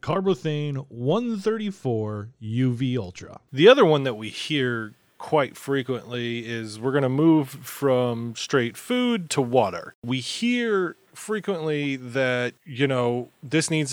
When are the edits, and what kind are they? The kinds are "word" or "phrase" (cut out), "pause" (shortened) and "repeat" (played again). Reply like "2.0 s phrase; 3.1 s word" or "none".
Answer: 11.1 s pause